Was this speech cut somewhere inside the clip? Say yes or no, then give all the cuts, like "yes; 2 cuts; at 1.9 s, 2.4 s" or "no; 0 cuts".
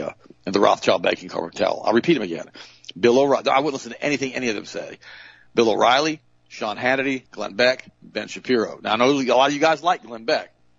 yes; 1 cut; at 7.3 s